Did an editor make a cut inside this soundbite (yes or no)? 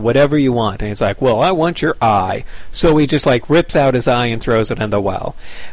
no